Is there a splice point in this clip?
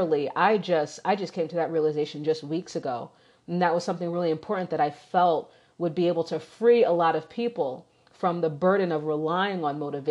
no; 0 cuts

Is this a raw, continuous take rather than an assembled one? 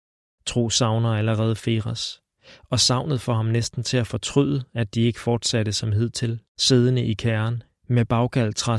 no; 1 cut; at 6.5 s

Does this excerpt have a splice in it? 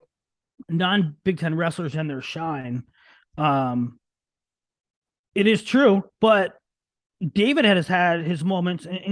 no; 0 cuts

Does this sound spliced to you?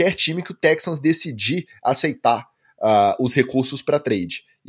no; 0 cuts

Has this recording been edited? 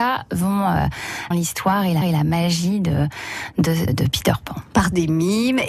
yes; 3 cuts; at 1.3 s, 2.0 s, 3.9 s

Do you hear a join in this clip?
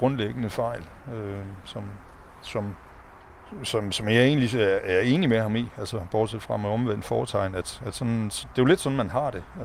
no; 0 cuts

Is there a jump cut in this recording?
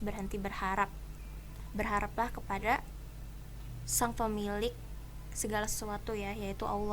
no; 0 cuts

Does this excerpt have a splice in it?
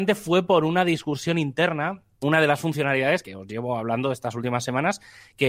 yes; 2 cuts; at 2.2 s, 3.2 s

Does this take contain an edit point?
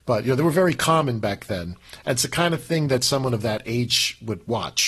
no; 0 cuts

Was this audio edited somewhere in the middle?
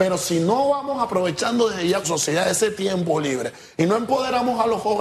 yes; 1 cut; at 2.0 s

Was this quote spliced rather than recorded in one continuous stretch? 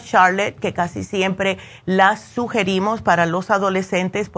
no; 0 cuts

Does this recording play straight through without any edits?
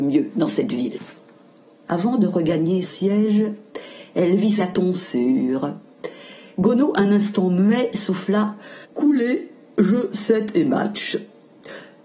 no; 3 cuts; at 2.8 s, 4.6 s, 8.8 s

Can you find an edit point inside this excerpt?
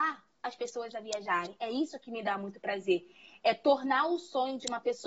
no; 0 cuts

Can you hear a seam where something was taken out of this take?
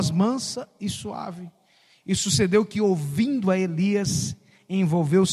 no; 0 cuts

